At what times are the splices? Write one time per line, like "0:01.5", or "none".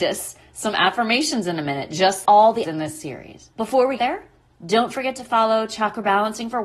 0:02.2
0:02.6
0:03.5
0:04.0

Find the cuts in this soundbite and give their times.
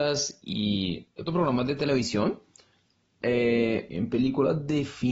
0:01.3
0:03.9

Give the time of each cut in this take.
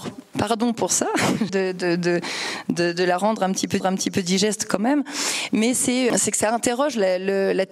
0:01.5
0:03.8
0:06.1

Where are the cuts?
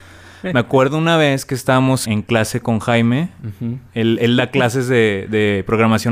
0:02.0

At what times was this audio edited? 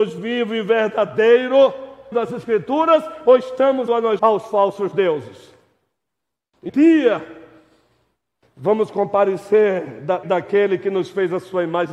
0:02.1
0:03.9
0:04.2
0:06.7
0:10.2

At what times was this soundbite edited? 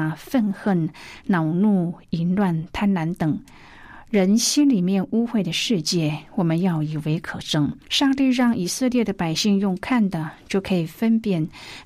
0:07.8

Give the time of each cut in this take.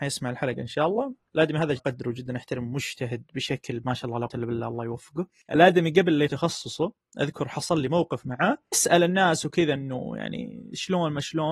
0:01.8
0:04.3
0:06.3
0:08.7

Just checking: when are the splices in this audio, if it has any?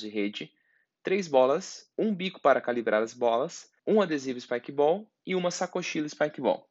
0:01.9
0:03.8

